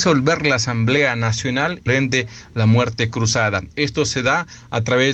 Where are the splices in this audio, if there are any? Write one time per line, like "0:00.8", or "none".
0:01.9